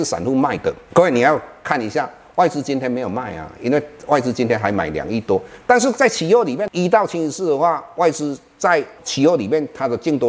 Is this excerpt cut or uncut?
uncut